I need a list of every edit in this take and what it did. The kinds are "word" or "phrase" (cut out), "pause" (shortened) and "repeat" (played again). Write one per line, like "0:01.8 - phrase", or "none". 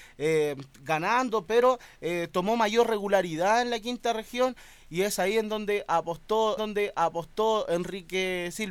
0:06.6 - repeat